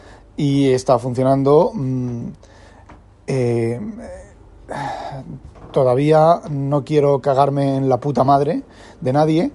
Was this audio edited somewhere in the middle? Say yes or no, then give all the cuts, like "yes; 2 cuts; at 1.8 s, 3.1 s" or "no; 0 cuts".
no; 0 cuts